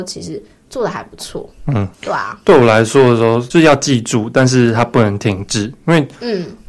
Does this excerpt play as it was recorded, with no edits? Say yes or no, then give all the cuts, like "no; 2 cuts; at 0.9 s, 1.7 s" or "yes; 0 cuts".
no; 1 cut; at 1.9 s